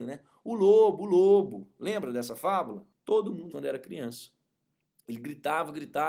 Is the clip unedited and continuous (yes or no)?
no